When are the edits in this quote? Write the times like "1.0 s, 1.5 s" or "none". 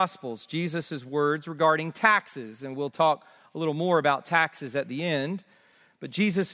none